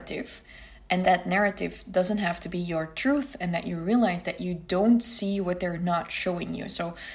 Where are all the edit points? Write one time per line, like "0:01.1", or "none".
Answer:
0:01.0